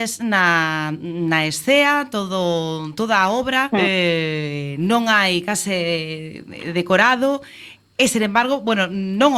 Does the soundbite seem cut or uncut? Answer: cut